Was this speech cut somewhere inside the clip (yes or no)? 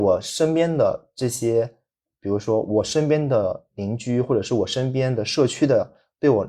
no